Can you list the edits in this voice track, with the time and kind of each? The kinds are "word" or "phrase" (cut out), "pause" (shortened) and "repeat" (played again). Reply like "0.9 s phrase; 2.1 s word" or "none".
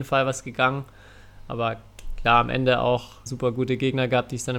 3.3 s word